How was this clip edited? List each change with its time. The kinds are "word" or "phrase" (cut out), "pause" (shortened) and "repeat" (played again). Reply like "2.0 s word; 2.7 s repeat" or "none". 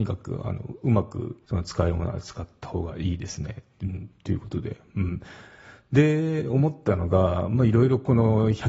1.4 s pause